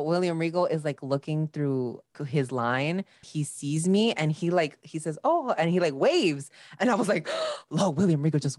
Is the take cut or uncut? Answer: cut